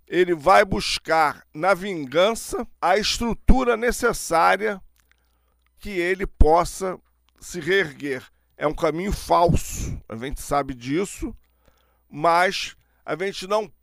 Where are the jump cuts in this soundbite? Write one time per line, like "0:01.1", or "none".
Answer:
0:02.7
0:05.8

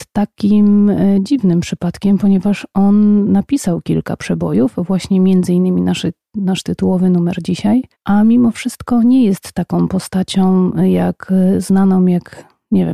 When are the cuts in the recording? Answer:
none

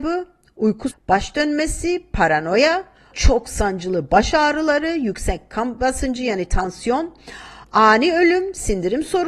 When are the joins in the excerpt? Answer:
0:00.9
0:03.1

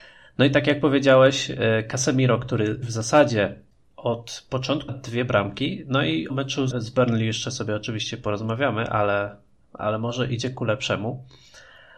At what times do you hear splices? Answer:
0:02.8
0:04.9
0:06.3
0:06.7

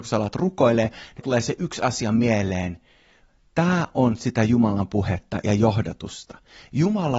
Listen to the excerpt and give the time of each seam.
0:01.2

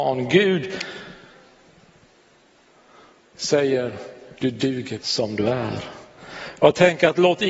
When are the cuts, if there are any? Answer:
0:04.3
0:05.0

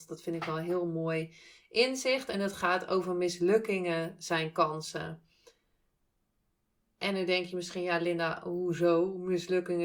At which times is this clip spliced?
none

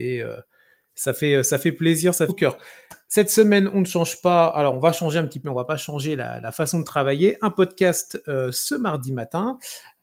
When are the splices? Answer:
0:02.3
0:05.4

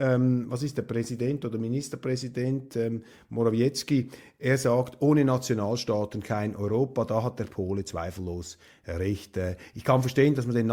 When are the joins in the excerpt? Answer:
none

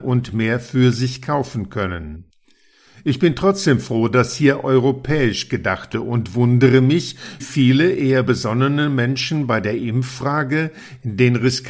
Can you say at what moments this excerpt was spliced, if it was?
0:05.9
0:07.4

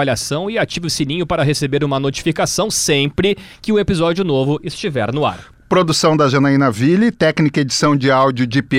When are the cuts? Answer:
none

